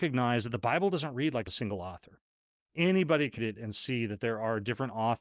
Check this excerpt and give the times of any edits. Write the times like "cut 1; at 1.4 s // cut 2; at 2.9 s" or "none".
cut 1; at 1.5 s // cut 2; at 3.4 s